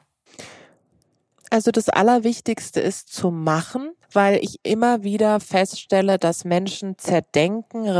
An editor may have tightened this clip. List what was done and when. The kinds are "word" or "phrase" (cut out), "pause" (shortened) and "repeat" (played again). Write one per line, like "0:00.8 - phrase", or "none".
0:04.0 - pause